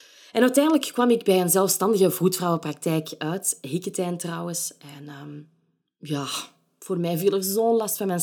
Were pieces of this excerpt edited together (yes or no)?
no